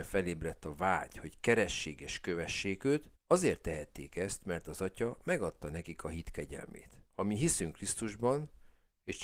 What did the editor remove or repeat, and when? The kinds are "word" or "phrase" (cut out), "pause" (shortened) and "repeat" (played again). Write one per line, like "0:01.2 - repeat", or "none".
0:03.1 - pause
0:07.1 - pause